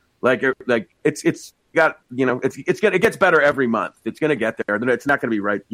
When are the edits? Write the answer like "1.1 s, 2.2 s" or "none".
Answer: 1.0 s, 1.7 s